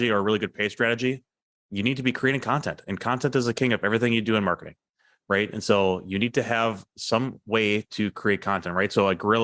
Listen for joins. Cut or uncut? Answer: uncut